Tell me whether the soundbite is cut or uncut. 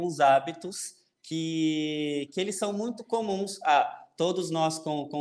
uncut